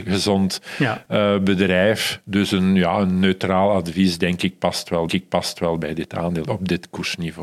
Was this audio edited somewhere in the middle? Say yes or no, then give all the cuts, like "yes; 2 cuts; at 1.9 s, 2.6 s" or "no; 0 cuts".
yes; 2 cuts; at 5.1 s, 6.4 s